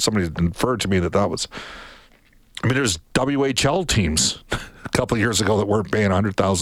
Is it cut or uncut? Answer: uncut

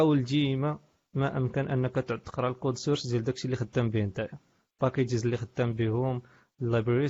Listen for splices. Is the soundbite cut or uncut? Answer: uncut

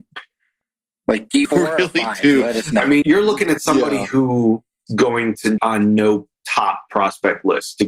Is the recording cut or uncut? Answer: cut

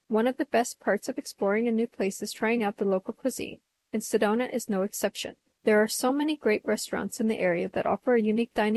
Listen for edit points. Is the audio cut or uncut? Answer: uncut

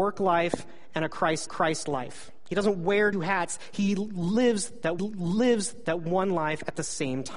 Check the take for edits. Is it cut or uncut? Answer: cut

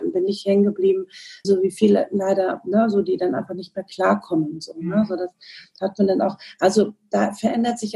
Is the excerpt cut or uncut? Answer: cut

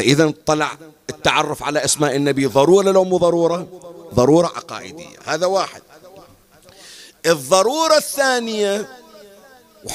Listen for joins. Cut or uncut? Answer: uncut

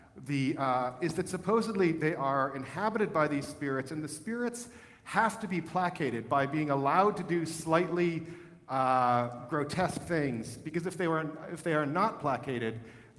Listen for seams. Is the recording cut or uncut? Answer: uncut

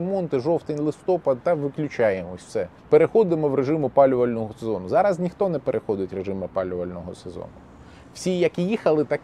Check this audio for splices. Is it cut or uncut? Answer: cut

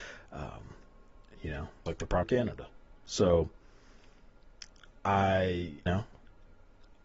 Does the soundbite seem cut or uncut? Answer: cut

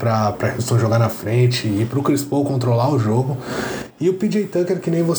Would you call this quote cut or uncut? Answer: uncut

